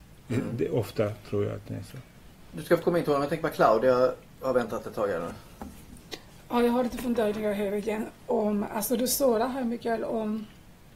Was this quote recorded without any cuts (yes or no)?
yes